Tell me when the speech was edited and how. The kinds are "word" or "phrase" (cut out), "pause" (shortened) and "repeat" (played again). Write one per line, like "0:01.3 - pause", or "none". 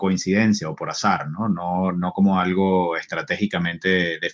none

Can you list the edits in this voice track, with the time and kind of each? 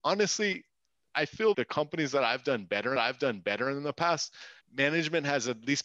0:01.5 - word
0:03.0 - repeat
0:04.6 - pause

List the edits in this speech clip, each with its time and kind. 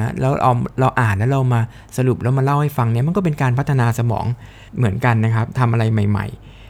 0:04.7 - pause

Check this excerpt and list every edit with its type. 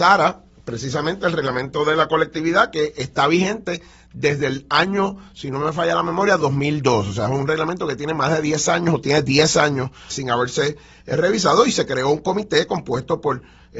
0:10.1 - word

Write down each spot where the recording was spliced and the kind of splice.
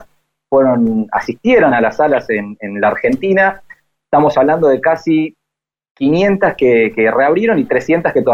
none

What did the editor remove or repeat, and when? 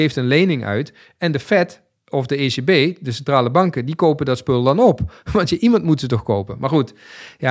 none

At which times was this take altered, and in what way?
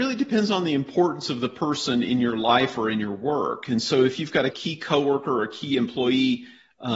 0:04.5 - phrase

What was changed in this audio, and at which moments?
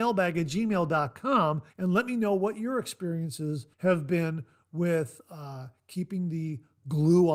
0:01.7 - pause
0:03.7 - pause

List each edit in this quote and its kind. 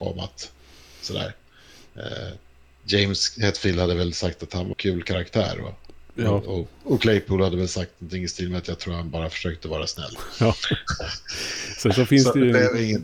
0:04.7 - word

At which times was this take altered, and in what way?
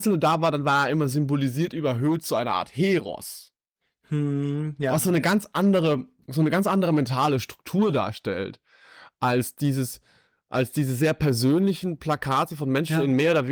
none

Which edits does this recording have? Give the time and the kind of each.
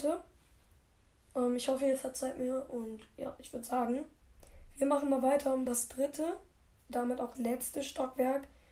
0:05.7 - word
0:06.9 - word
0:07.3 - word

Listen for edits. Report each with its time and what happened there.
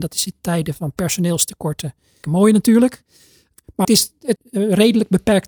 0:02.2 - word
0:03.8 - word
0:04.4 - word

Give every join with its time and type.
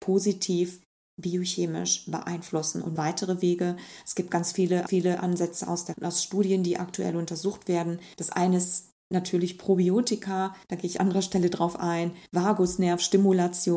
0:03.0 - phrase
0:04.9 - repeat
0:05.9 - word
0:08.1 - pause
0:10.6 - pause
0:11.0 - phrase
0:12.3 - pause

